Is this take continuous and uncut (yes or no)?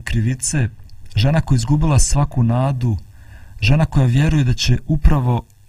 yes